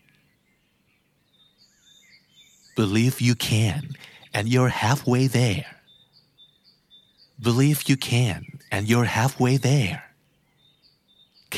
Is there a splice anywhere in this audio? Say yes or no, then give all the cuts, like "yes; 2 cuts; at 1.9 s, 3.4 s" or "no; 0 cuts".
no; 0 cuts